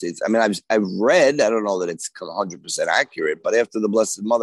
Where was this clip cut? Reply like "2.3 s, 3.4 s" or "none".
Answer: none

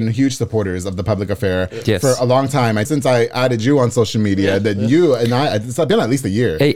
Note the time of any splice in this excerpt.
2.8 s

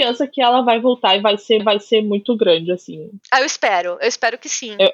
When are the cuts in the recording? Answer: 1.6 s

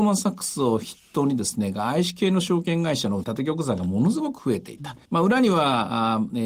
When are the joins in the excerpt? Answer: 3.2 s, 5.0 s

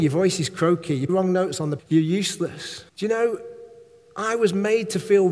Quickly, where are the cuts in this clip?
1.1 s, 1.8 s, 2.9 s

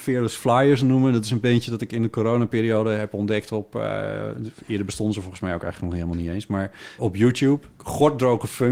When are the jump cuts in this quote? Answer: 7.0 s

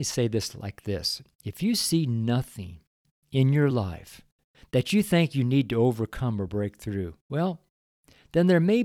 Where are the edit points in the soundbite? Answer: none

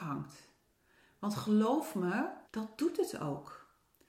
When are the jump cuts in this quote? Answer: 2.4 s

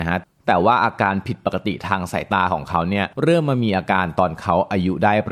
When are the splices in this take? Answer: 3.1 s

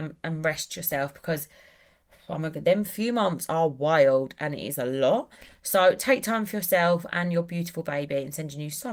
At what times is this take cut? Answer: none

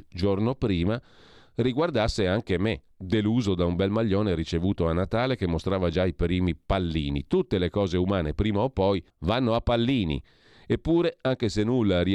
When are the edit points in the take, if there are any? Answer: 2.9 s, 9.1 s

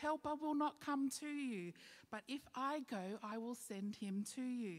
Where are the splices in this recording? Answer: none

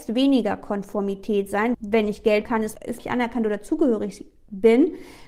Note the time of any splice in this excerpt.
1.7 s, 2.5 s, 3.0 s

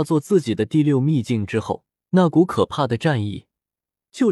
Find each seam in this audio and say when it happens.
2.0 s

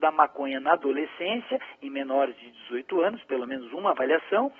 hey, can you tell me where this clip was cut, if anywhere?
none

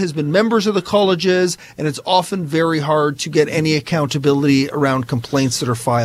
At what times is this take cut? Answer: none

